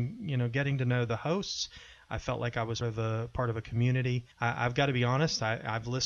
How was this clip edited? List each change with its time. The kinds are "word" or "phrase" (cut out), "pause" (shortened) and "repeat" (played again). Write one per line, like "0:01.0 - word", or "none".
0:02.8 - word
0:04.3 - pause